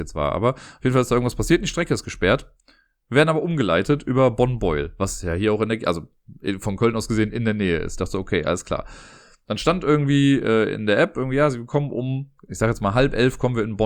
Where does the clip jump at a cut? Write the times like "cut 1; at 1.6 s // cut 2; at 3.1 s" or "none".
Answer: cut 1; at 12.4 s